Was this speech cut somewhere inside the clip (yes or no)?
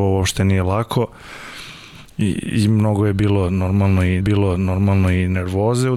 yes